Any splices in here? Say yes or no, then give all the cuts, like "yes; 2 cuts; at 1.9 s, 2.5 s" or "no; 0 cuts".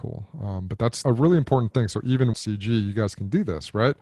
yes; 2 cuts; at 1.0 s, 2.3 s